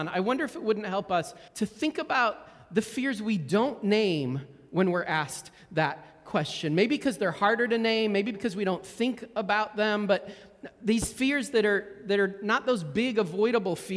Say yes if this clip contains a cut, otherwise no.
yes